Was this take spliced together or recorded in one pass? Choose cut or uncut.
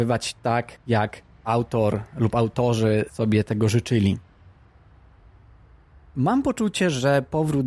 uncut